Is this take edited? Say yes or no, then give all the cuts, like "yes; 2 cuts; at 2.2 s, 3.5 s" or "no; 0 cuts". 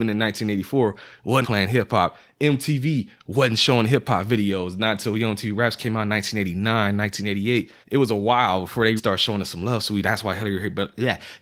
yes; 3 cuts; at 1.4 s, 7.8 s, 9.0 s